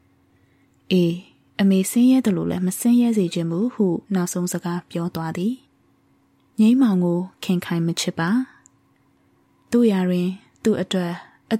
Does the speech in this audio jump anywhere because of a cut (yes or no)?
yes